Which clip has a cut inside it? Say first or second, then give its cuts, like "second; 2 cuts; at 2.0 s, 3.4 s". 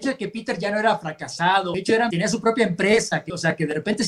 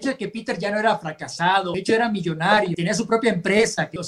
first; 1 cut; at 2.1 s